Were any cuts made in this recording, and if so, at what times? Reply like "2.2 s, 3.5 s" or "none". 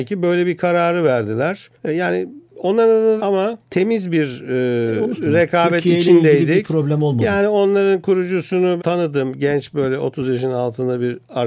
1.8 s, 3.2 s, 3.7 s, 5.2 s, 8.8 s